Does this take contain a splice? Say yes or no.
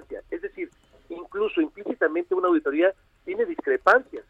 no